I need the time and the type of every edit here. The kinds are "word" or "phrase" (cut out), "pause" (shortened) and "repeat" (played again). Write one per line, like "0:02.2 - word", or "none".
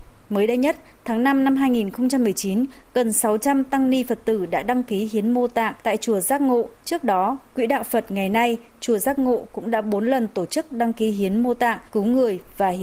0:05.8 - pause
0:06.8 - pause
0:11.9 - pause